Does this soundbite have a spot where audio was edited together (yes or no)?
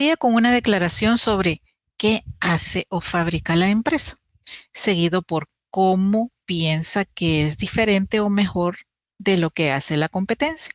no